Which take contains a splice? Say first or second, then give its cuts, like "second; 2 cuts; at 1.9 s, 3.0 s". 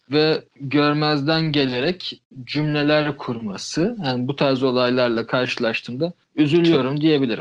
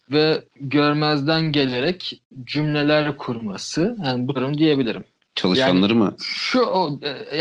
second; 1 cut; at 4.4 s